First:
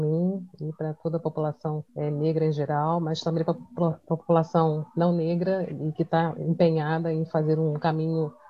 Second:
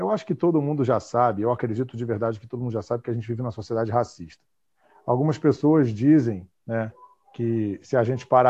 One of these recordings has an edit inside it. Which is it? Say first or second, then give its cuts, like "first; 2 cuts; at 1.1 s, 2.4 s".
first; 1 cut; at 1.9 s